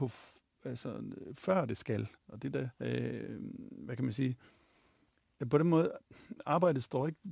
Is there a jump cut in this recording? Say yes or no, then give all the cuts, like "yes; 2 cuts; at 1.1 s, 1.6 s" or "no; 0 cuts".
yes; 2 cuts; at 2.2 s, 2.7 s